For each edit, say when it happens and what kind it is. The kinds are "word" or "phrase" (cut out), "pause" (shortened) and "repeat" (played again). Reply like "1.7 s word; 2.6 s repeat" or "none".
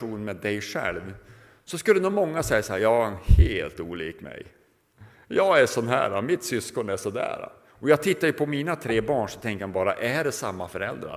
none